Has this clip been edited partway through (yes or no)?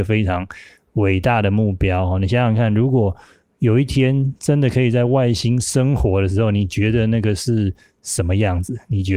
no